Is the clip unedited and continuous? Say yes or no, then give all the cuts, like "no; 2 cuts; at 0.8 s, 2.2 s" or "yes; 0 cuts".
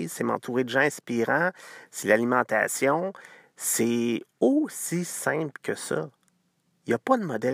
yes; 0 cuts